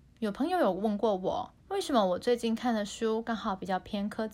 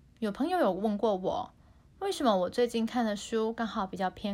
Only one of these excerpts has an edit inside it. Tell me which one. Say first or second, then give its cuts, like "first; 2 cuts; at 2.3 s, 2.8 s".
first; 1 cut; at 1.6 s